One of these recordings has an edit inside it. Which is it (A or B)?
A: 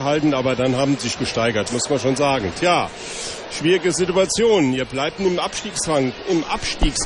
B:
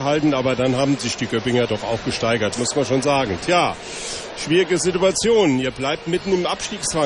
A